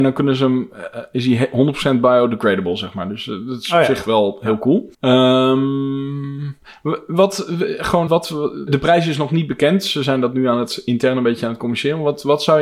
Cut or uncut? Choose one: cut